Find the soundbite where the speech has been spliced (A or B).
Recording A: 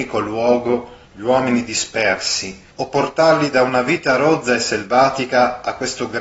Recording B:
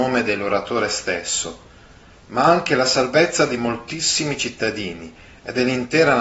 A